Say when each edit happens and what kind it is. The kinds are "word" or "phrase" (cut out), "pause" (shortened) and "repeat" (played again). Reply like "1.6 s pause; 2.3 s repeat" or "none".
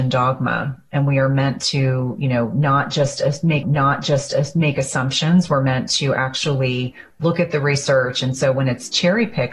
3.6 s repeat